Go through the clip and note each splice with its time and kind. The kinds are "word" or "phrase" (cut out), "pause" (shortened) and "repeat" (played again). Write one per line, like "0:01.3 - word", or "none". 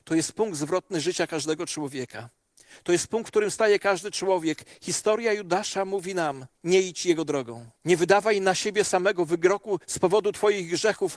0:06.5 - pause
0:07.8 - pause
0:09.8 - pause